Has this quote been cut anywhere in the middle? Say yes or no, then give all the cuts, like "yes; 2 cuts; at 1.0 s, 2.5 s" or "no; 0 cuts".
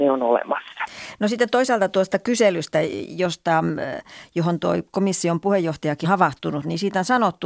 yes; 1 cut; at 6.0 s